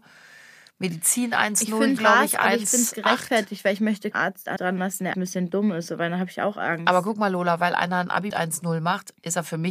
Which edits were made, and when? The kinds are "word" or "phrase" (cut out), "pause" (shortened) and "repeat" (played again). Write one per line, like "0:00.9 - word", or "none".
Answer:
0:02.0 - word
0:04.1 - word
0:04.6 - word
0:05.1 - word
0:08.3 - word